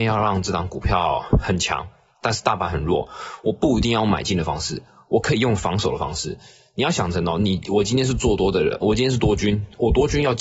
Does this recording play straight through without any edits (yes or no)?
no